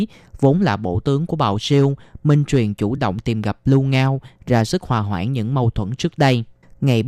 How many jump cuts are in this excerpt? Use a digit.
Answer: 0